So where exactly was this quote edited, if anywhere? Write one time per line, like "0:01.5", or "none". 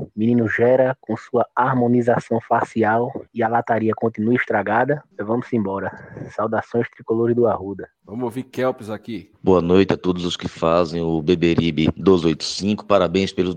0:03.3
0:05.1
0:07.9
0:09.4

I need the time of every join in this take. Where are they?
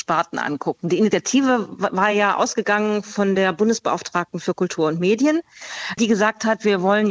none

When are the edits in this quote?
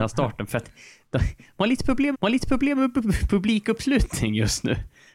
0:02.1

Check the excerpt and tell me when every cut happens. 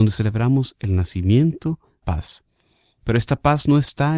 0:02.0

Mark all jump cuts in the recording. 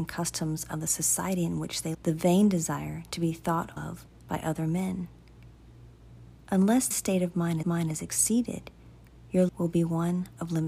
0:01.9
0:03.8
0:06.9
0:07.6
0:09.5

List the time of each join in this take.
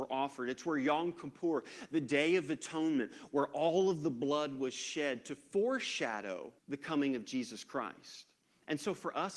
0:06.6
0:08.4

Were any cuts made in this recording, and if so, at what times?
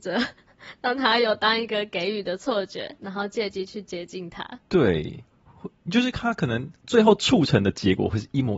0:04.6
0:06.8

